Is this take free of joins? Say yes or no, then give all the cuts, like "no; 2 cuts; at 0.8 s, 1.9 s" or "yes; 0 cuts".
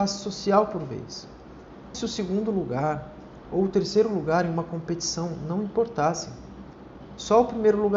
no; 1 cut; at 1.9 s